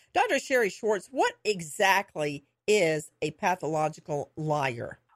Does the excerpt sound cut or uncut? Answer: uncut